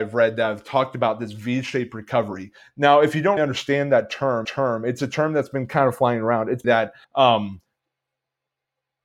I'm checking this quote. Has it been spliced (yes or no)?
yes